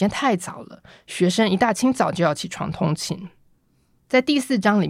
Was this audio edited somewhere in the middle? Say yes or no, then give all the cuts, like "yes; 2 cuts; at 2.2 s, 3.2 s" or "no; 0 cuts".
no; 0 cuts